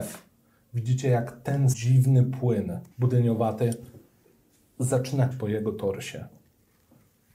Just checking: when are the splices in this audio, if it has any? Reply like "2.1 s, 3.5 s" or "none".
1.7 s, 2.9 s, 5.3 s